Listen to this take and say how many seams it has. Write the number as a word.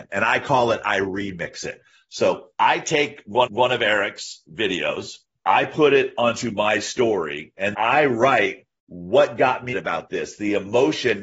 five